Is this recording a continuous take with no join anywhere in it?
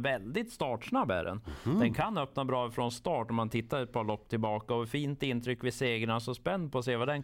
yes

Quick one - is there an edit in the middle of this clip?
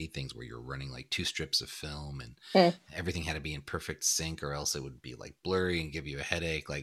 no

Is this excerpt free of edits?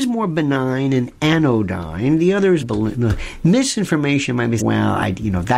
no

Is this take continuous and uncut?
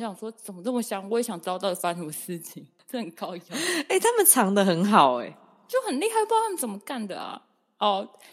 yes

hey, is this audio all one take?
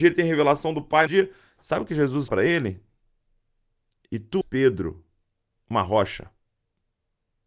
no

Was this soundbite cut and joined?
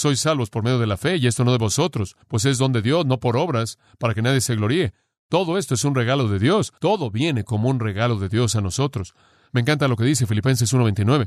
yes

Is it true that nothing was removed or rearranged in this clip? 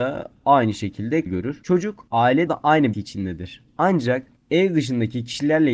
no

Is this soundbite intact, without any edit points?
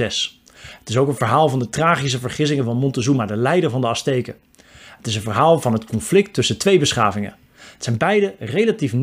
yes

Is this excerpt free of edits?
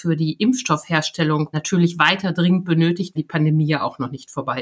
no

